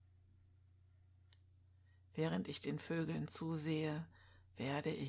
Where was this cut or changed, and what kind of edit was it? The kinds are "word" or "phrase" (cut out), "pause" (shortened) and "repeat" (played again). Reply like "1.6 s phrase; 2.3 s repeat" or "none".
none